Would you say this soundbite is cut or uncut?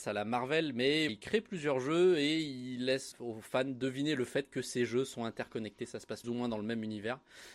cut